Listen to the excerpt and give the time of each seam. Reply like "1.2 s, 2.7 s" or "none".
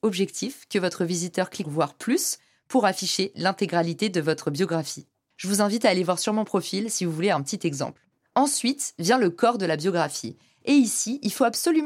1.6 s